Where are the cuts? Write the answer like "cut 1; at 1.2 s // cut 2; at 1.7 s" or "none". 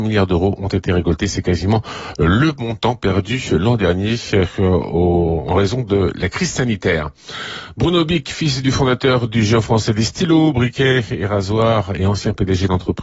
none